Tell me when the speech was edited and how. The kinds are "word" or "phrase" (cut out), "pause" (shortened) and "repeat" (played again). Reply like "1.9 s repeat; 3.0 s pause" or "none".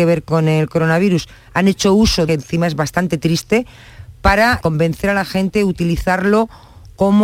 2.3 s phrase; 4.6 s word